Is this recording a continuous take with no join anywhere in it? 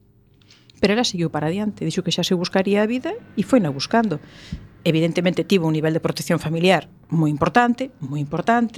yes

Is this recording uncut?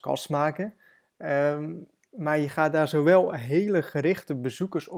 yes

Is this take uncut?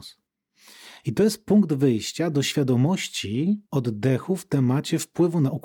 no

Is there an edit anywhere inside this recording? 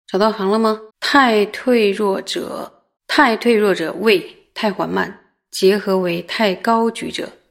yes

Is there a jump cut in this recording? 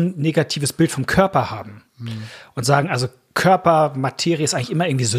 no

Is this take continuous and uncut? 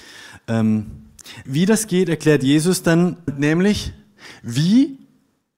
no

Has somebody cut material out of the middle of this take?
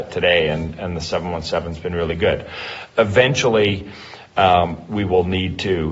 no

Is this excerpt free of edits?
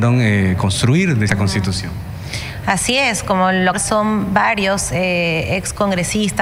no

